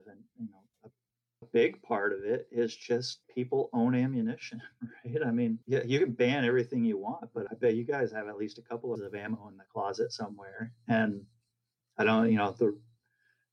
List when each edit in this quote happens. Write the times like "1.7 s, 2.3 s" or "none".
1.4 s, 3.2 s, 5.6 s, 7.5 s, 9.0 s